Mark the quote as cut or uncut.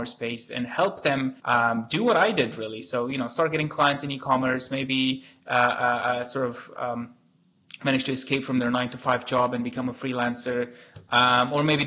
cut